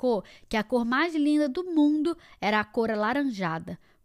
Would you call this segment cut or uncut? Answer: uncut